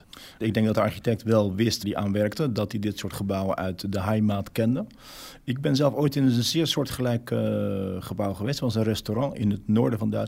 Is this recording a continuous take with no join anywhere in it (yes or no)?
no